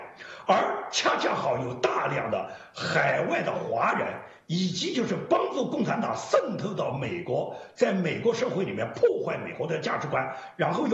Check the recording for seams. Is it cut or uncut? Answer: uncut